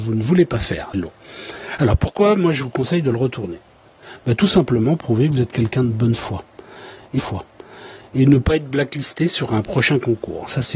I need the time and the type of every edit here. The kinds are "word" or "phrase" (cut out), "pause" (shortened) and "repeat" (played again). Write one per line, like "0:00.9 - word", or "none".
0:00.9 - phrase
0:05.0 - word
0:07.2 - repeat